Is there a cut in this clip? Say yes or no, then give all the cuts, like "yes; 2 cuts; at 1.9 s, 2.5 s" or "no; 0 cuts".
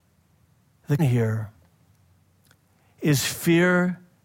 yes; 1 cut; at 1.0 s